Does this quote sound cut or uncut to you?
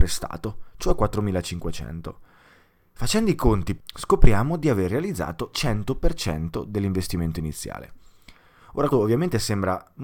cut